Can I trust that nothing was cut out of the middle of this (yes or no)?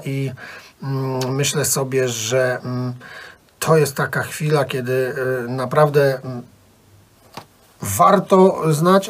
yes